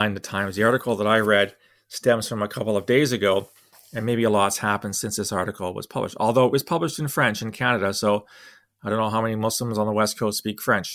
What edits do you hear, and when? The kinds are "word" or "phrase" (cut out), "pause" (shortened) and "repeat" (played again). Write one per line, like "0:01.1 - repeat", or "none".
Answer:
none